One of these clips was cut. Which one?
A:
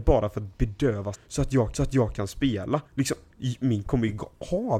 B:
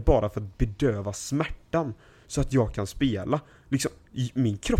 A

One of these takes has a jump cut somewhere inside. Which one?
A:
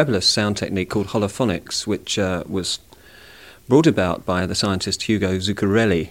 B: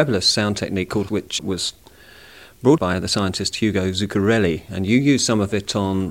B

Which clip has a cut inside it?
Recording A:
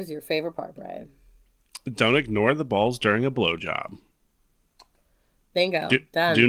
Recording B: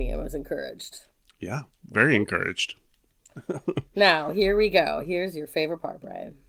B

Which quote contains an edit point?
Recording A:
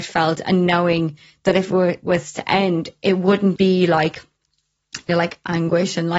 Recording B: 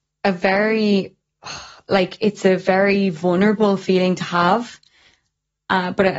A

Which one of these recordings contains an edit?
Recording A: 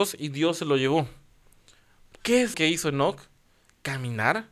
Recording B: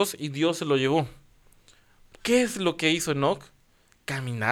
A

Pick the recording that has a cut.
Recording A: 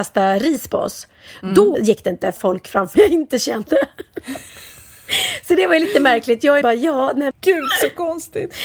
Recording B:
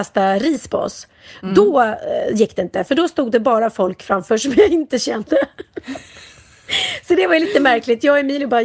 A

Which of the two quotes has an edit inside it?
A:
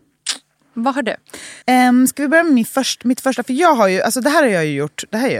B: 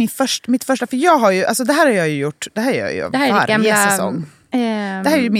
A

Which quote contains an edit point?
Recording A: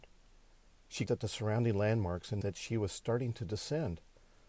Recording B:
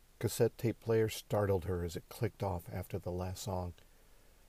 A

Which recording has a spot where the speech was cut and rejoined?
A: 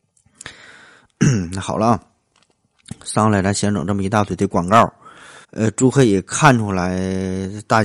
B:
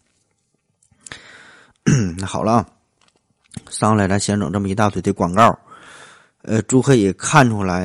A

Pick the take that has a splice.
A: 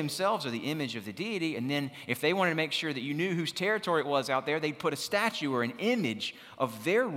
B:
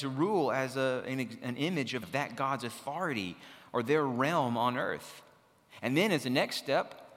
B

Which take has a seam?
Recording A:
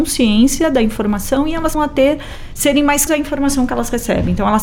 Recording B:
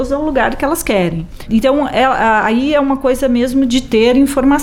A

